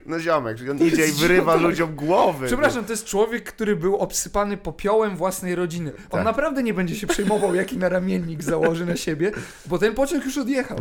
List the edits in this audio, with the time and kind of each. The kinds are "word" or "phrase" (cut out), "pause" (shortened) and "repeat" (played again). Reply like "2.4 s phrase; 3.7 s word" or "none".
none